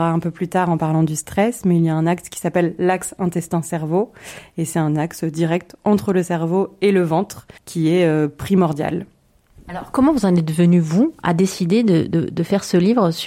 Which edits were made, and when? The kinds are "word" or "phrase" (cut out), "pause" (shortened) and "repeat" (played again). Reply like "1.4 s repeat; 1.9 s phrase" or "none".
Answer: 7.6 s pause